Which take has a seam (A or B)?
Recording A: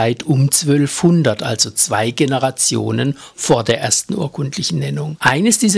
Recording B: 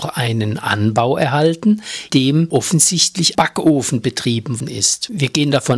B